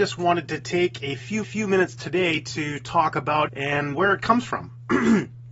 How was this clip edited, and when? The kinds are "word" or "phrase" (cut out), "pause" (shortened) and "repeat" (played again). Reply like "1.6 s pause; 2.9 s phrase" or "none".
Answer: 1.4 s repeat; 3.5 s word; 3.9 s word